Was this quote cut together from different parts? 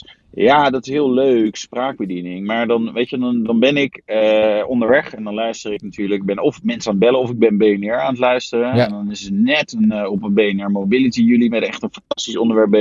no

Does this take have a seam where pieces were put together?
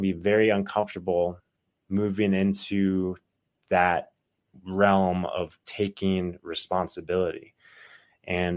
no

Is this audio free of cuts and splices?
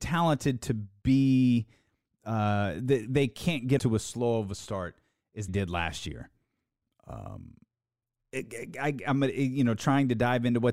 no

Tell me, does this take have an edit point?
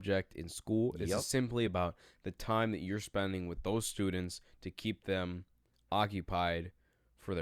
no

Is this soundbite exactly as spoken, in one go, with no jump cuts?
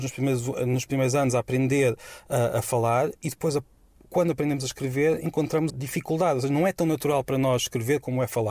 no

